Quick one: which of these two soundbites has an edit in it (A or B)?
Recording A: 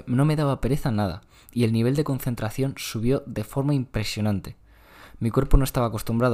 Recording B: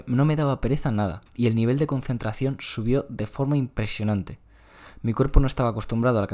B